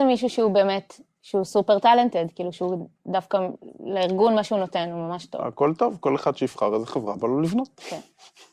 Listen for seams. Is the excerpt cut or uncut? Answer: uncut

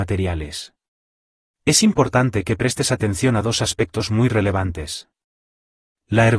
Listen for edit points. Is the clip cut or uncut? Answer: uncut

